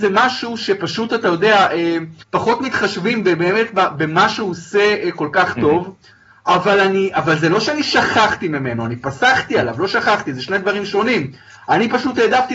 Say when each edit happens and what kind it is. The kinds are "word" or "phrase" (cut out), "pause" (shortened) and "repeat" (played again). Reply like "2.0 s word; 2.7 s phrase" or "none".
2.2 s pause